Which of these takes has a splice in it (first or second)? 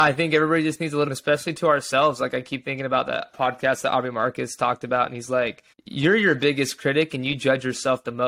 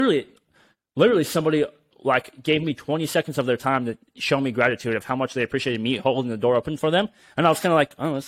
first